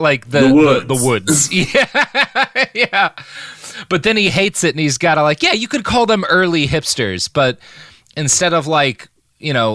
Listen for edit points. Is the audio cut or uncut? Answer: uncut